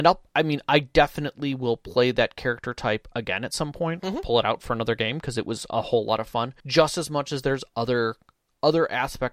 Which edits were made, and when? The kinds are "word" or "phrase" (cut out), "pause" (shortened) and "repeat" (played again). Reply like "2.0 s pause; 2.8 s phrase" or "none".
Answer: 6.6 s pause